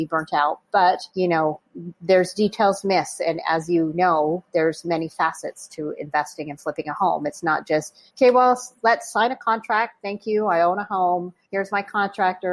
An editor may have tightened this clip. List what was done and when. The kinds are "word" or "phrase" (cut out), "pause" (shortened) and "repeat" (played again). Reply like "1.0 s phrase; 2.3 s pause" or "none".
1.1 s pause; 8.1 s pause; 11.4 s pause